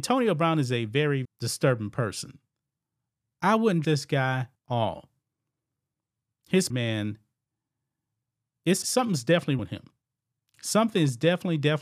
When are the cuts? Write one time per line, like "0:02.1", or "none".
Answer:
0:01.2
0:03.8
0:04.5
0:06.7
0:08.8
0:09.6